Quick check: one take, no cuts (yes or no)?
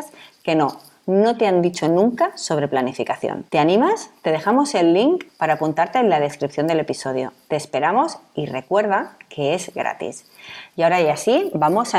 no